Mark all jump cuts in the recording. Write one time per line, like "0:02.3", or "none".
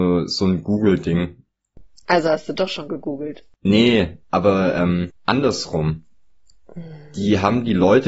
0:04.2
0:05.2